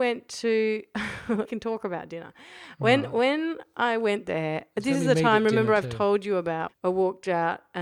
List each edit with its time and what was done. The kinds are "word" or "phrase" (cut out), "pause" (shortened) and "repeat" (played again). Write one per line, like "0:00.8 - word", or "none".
0:01.4 - word
0:06.7 - word